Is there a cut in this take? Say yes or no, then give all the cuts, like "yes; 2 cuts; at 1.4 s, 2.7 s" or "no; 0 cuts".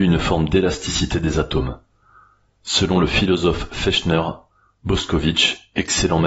no; 0 cuts